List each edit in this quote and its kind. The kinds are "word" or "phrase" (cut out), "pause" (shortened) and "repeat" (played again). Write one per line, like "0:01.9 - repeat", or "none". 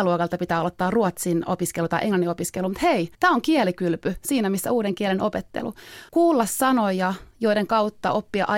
0:03.1 - pause
0:06.1 - pause